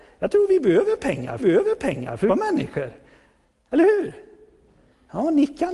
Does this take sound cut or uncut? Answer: cut